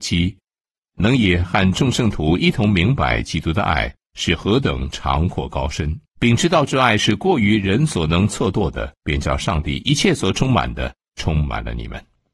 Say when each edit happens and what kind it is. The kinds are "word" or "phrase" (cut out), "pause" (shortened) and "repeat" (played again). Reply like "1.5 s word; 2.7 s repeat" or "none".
6.1 s pause; 9.0 s pause